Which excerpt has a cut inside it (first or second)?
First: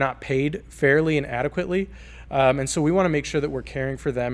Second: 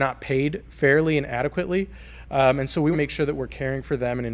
second